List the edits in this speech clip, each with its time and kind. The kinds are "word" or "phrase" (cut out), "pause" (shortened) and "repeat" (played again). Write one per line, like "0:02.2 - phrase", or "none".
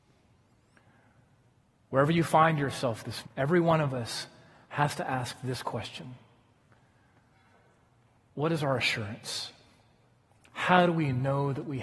0:03.2 - word